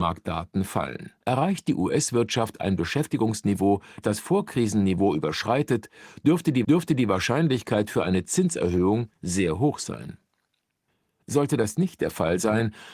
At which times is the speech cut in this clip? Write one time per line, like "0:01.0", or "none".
0:01.2
0:04.0
0:06.6